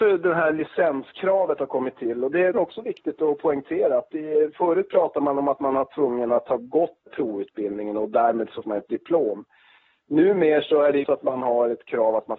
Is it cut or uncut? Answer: cut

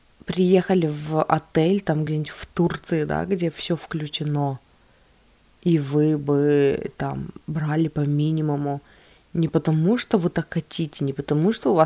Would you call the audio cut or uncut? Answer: uncut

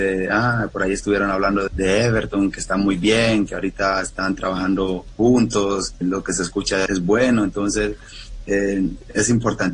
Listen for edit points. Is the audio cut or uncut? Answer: cut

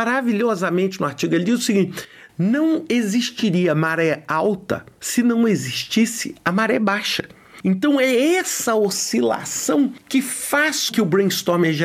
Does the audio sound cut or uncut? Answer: cut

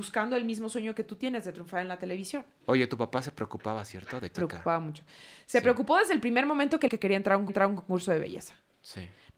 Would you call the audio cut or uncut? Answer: cut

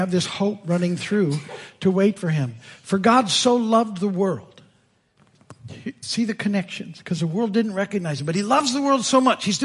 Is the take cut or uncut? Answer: uncut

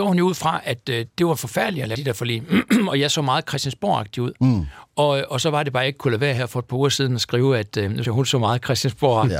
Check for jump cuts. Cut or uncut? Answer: cut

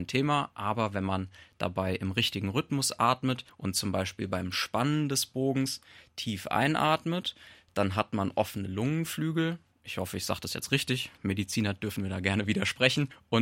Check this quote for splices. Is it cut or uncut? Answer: uncut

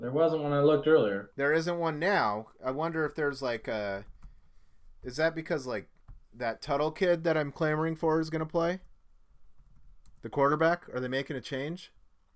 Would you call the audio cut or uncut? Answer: uncut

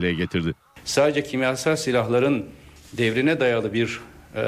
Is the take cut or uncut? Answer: uncut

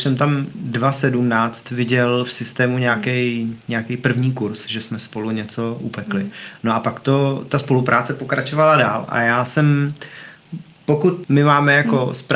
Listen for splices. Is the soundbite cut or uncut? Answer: cut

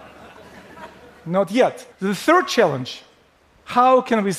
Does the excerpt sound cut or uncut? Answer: cut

